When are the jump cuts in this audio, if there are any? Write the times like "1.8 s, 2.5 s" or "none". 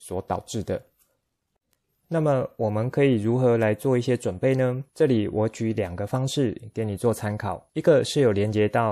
4.9 s, 7.7 s